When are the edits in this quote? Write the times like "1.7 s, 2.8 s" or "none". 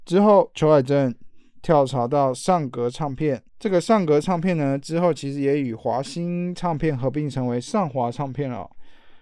3.5 s